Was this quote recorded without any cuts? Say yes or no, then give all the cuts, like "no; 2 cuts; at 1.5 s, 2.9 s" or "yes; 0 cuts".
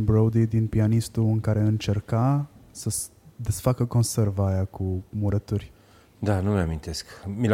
yes; 0 cuts